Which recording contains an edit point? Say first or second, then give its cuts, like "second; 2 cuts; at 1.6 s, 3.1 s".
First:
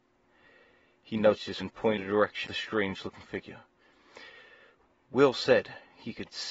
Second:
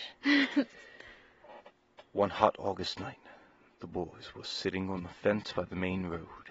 first; 3 cuts; at 1.6 s, 2.0 s, 2.4 s